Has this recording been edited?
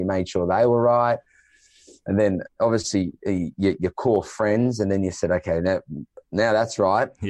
no; 0 cuts

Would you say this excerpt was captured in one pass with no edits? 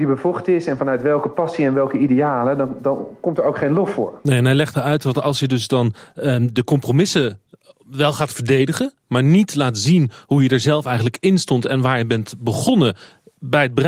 yes; 0 cuts

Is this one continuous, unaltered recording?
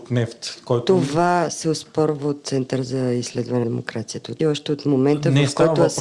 no; 2 cuts; at 3.6 s, 4.4 s

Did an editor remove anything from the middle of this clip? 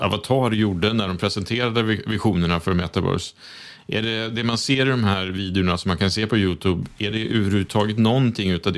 no; 0 cuts

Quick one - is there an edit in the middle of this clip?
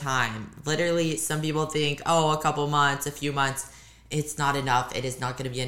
no; 0 cuts

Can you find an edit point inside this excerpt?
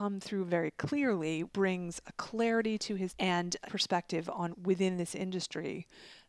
yes; 4 cuts; at 1.5 s, 3.1 s, 3.6 s, 4.5 s

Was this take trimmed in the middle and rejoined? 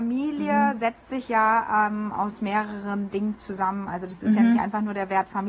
no; 0 cuts

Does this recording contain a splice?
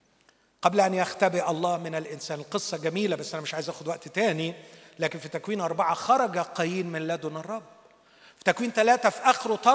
no; 0 cuts

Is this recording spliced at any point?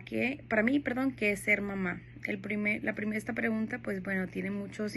no; 0 cuts

